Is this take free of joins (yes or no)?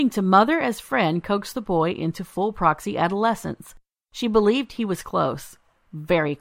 yes